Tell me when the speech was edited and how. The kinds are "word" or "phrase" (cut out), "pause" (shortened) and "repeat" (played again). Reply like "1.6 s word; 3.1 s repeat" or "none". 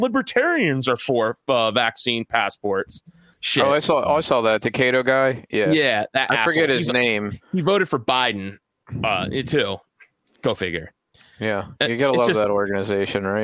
none